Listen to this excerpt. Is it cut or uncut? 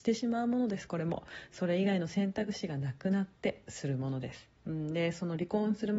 cut